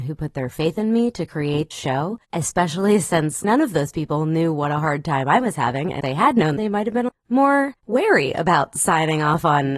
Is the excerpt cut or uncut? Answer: cut